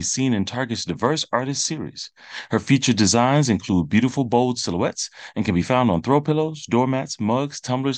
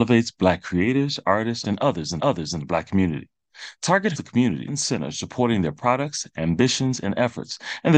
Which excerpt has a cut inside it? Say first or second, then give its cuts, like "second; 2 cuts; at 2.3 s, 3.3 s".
second; 4 cuts; at 1.6 s, 2.2 s, 4.2 s, 4.7 s